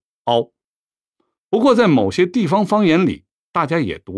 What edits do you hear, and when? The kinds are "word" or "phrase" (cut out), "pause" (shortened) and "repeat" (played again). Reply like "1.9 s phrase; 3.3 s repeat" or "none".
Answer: none